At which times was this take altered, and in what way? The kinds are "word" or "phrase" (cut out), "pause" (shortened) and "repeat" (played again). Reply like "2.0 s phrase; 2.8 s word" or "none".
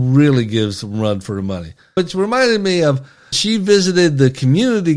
2.0 s word; 3.3 s word